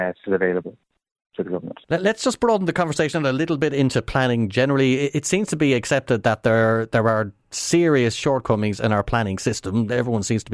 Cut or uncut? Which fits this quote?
cut